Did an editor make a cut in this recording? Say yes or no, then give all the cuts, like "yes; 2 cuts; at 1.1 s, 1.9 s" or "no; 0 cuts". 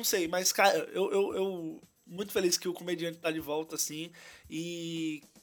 no; 0 cuts